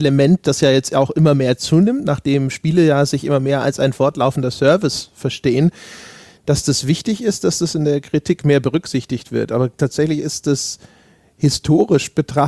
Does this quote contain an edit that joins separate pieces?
no; 0 cuts

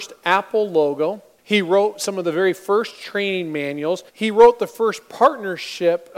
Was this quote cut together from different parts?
yes; 2 cuts; at 1.4 s, 4.1 s

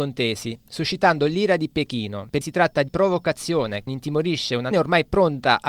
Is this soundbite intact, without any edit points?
no; 4 cuts; at 2.4 s, 2.9 s, 3.9 s, 4.7 s

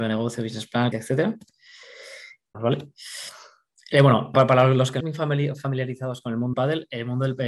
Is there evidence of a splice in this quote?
yes; 5 cuts; at 0.9 s, 2.5 s, 4.3 s, 5.0 s, 6.5 s

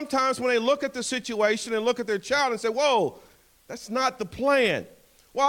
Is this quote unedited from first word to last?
yes; 0 cuts

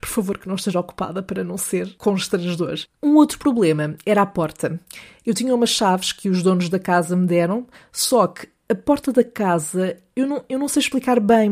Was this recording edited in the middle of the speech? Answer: no; 0 cuts

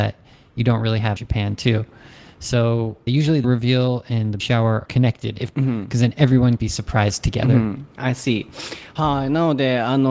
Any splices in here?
yes; 7 cuts; at 1.2 s, 3.1 s, 3.4 s, 4.4 s, 4.8 s, 5.5 s, 6.6 s

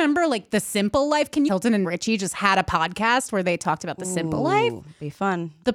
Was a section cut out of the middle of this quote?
yes; 2 cuts; at 1.5 s, 1.8 s

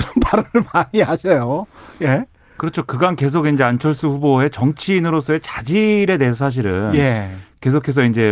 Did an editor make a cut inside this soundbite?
no; 0 cuts

